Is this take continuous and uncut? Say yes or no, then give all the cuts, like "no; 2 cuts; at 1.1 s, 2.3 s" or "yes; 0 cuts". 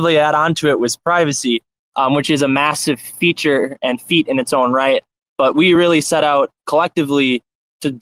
yes; 0 cuts